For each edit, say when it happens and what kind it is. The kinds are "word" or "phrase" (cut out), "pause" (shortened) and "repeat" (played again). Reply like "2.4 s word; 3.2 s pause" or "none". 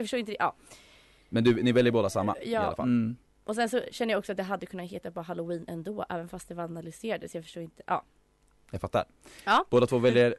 none